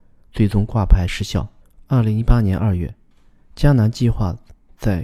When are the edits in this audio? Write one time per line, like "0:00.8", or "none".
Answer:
0:01.6